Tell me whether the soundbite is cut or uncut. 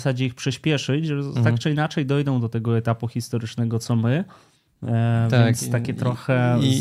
uncut